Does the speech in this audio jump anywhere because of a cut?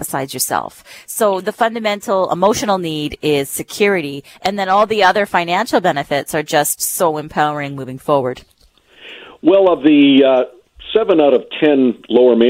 no; 0 cuts

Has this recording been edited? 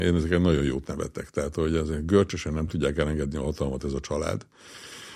no; 0 cuts

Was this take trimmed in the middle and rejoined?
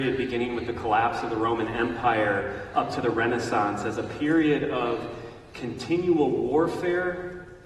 no; 0 cuts

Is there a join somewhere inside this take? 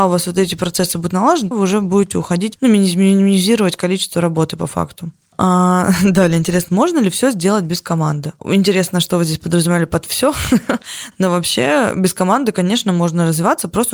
yes; 2 cuts; at 1.5 s, 6.7 s

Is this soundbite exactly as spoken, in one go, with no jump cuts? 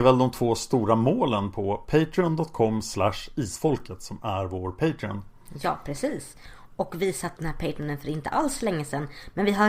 no; 1 cut; at 7.4 s

